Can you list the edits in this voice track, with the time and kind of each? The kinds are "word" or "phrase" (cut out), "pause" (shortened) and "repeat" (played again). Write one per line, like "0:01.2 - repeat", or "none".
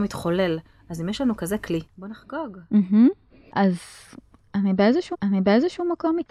0:01.9 - word
0:05.1 - repeat